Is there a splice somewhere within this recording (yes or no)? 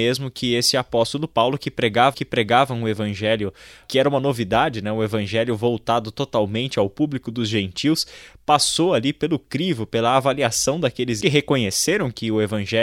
yes